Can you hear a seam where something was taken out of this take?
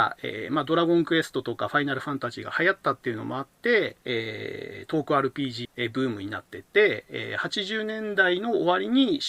yes; 2 cuts; at 4.0 s, 5.6 s

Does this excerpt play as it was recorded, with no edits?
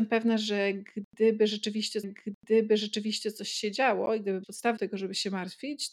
no; 3 cuts; at 2.0 s, 4.4 s, 4.8 s

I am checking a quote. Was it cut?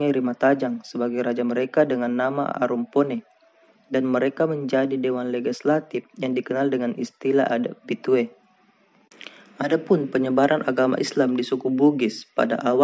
no; 0 cuts

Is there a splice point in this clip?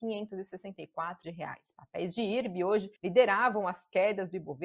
yes; 2 cuts; at 1.2 s, 3.0 s

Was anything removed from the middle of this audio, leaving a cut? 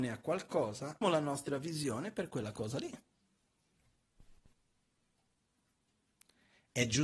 yes; 1 cut; at 1.0 s

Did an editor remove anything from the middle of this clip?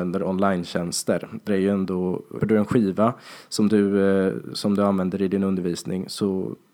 yes; 2 cuts; at 1.5 s, 2.4 s

